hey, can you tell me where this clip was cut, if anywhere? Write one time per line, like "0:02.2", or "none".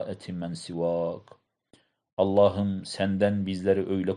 none